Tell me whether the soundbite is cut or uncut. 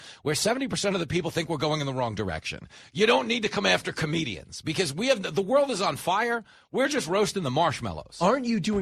uncut